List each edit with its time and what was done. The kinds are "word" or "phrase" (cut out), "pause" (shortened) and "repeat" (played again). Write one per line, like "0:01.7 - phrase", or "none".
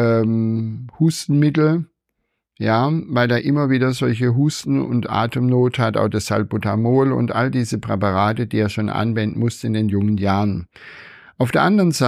none

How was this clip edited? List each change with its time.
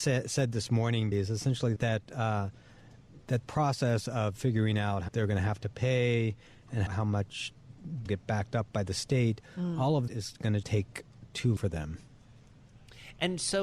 0:01.1 - word
0:01.8 - word
0:03.4 - word
0:05.1 - word
0:06.9 - word
0:08.1 - word
0:10.1 - word
0:10.6 - word
0:11.6 - word

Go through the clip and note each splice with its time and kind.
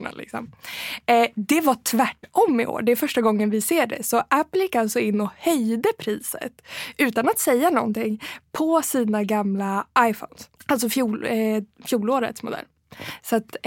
0:10.6 - pause

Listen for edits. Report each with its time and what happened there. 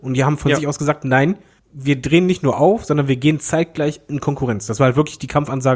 0:01.6 - pause

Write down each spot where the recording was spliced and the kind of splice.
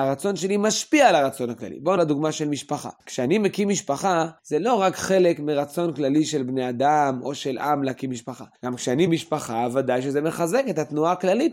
0:02.0 - word
0:03.0 - pause
0:04.4 - pause
0:08.5 - pause
0:09.1 - word

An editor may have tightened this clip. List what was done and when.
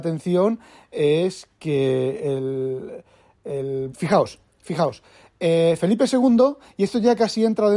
0:03.9 - word

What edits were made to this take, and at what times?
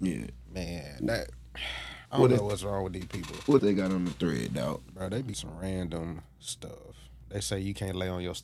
0:02.1 - pause
0:03.6 - word
0:05.3 - phrase

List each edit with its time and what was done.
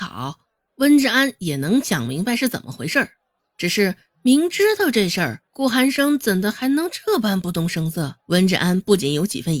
0:03.3 - pause
0:05.5 - pause
0:08.2 - pause

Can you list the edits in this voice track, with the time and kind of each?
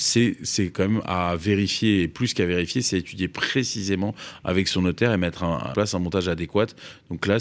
0:05.7 - phrase

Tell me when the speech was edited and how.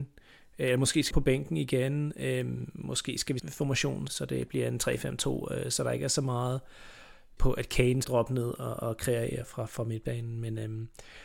0:01.1 - word
0:03.4 - word
0:04.1 - word
0:07.4 - word
0:08.0 - word
0:09.4 - word

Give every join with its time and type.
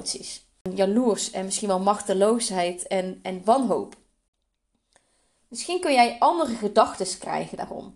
none

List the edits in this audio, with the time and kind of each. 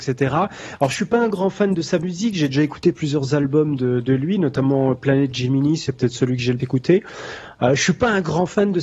0:06.6 - word

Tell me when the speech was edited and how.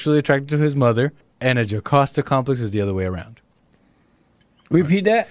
0:01.2 - pause

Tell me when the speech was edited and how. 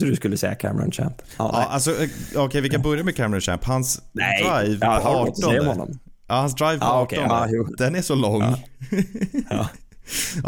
none

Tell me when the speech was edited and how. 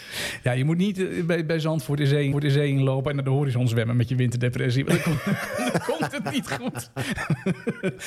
0:02.3 - repeat

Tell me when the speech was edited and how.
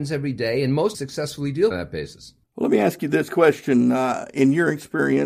0:00.9 - phrase
0:01.7 - phrase
0:02.4 - pause

